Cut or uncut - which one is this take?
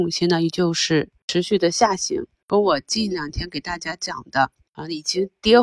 uncut